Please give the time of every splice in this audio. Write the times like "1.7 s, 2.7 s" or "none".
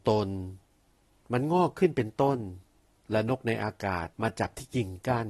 4.1 s